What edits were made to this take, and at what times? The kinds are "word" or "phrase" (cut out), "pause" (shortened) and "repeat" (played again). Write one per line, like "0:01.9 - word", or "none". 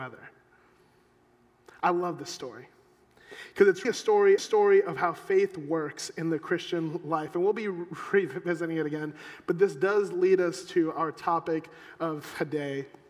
0:03.8 - word
0:04.4 - repeat